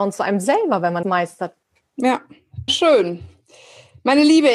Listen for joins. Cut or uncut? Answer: cut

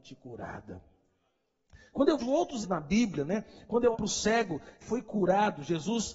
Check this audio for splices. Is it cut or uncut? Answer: cut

